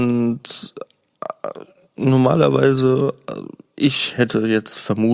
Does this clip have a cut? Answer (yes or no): no